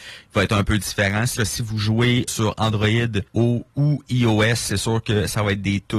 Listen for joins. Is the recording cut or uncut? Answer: cut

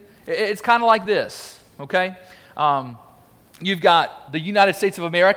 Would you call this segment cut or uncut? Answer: uncut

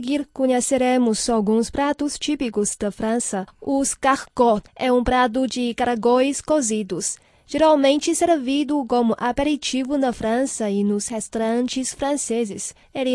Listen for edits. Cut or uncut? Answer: cut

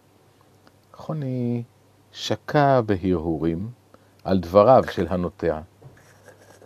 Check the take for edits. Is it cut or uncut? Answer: uncut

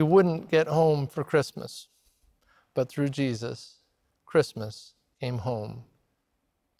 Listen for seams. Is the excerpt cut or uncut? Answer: uncut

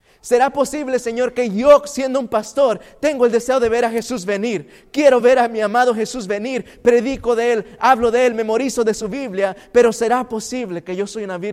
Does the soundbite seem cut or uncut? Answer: uncut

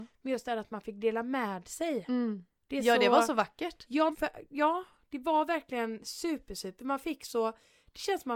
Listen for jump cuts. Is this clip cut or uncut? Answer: cut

